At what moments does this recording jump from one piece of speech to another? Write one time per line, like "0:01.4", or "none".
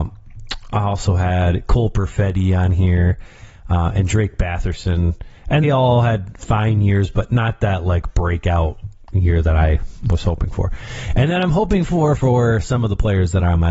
0:05.6